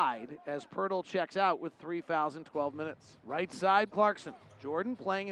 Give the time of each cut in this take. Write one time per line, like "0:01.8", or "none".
none